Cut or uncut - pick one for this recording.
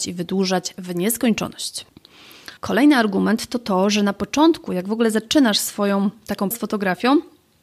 cut